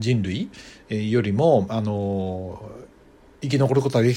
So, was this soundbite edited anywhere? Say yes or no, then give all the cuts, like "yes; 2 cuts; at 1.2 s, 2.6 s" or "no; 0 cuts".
no; 0 cuts